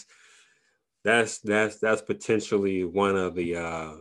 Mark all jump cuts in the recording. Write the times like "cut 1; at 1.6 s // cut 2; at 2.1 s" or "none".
none